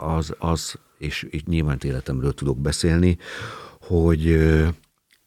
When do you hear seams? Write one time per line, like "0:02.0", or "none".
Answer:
0:01.8